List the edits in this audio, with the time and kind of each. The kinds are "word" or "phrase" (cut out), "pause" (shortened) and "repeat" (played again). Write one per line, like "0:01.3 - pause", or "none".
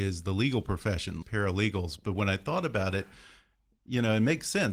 0:01.2 - word